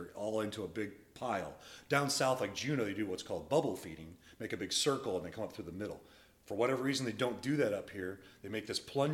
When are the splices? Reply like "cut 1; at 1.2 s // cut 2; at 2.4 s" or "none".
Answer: none

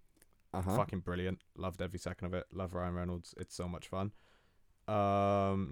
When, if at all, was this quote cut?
none

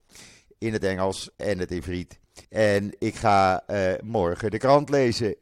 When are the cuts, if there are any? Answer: cut 1; at 1.3 s // cut 2; at 2.4 s

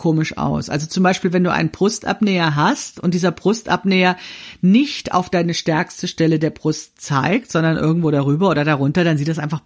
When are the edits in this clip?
none

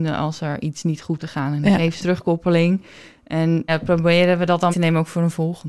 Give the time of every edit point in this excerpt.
cut 1; at 1.2 s // cut 2; at 2.0 s // cut 3; at 3.7 s // cut 4; at 4.7 s

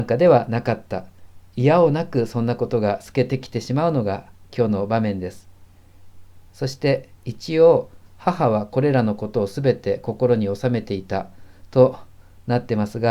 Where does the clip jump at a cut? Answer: cut 1; at 6.5 s // cut 2; at 7.2 s

